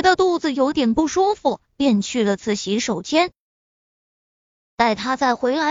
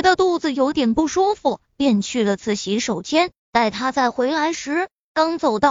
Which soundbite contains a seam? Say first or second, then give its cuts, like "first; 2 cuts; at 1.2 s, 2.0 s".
second; 1 cut; at 3.4 s